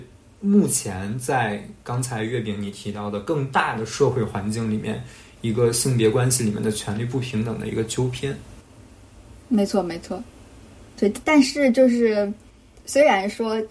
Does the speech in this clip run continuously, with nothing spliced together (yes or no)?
yes